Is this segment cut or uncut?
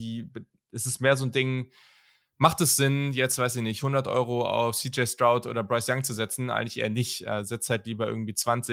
uncut